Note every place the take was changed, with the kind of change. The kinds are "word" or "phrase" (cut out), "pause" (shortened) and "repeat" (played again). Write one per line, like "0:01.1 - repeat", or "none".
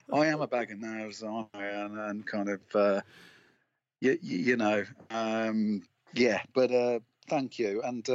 none